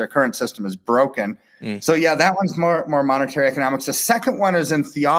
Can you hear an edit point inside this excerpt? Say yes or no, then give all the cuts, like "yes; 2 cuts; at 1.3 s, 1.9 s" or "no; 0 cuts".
no; 0 cuts